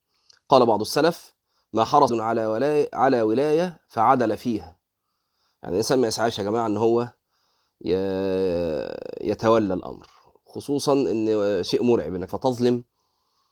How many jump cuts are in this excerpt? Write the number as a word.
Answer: two